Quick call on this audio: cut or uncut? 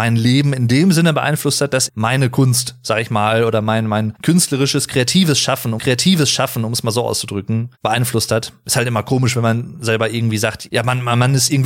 cut